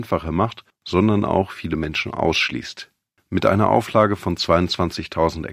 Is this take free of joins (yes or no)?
yes